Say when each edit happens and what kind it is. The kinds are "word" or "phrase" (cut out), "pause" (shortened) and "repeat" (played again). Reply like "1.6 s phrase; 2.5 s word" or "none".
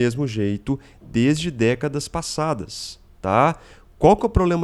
none